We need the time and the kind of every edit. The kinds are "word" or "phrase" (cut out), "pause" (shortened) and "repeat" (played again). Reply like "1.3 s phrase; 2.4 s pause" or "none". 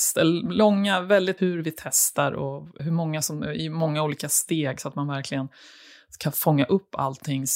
1.4 s word; 2.8 s word